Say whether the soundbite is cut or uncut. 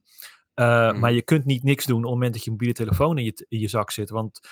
uncut